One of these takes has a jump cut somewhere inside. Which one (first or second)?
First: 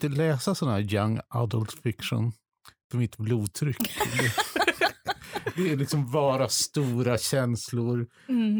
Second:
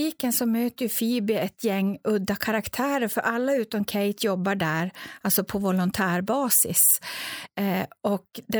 first